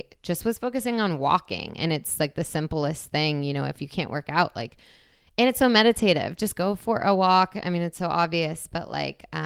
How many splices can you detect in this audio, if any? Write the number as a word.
zero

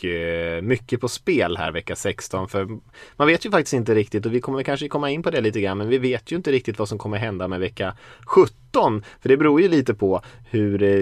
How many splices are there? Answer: zero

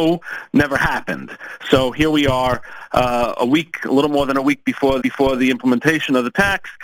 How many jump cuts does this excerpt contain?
one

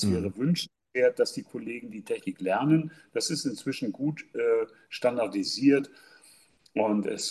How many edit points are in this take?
zero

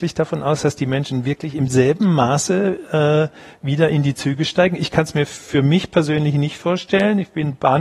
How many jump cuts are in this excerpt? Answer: zero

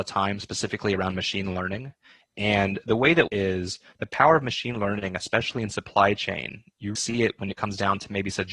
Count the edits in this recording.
two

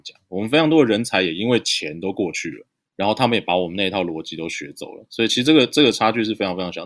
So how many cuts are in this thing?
one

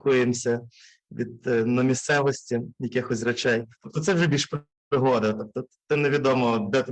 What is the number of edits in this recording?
zero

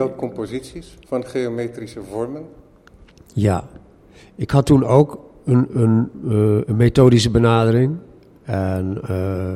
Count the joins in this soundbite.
zero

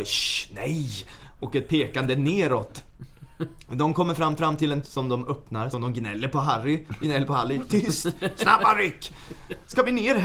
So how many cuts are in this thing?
four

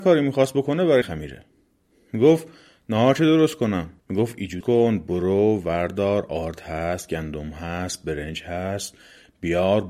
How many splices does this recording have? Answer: three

